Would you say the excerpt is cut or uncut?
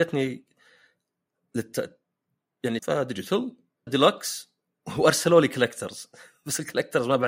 cut